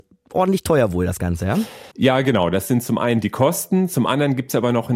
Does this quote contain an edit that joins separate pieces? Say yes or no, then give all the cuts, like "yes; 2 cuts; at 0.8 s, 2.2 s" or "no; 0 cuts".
yes; 1 cut; at 1.9 s